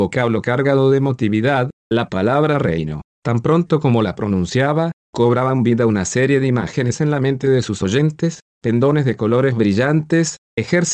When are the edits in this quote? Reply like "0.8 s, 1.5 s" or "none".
none